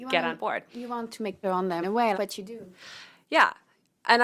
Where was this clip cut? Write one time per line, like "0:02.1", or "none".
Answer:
0:01.4
0:01.8
0:02.1